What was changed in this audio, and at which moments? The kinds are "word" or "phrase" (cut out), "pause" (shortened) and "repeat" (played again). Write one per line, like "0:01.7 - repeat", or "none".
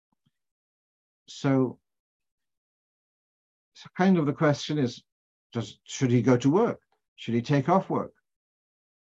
0:05.1 - pause
0:06.9 - pause